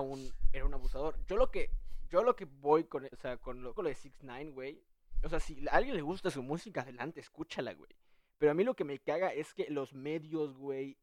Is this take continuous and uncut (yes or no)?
no